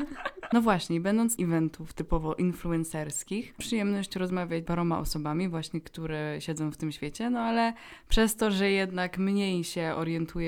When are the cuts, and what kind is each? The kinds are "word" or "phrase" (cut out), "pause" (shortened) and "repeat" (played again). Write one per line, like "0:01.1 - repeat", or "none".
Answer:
0:01.4 - phrase
0:03.6 - word
0:04.7 - word